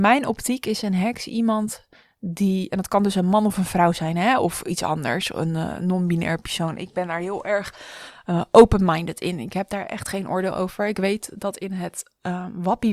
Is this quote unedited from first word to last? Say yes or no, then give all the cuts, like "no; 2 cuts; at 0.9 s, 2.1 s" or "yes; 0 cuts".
yes; 0 cuts